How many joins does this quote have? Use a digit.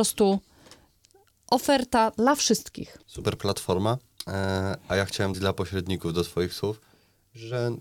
2